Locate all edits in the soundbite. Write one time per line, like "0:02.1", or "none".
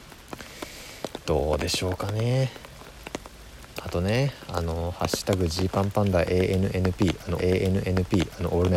0:07.4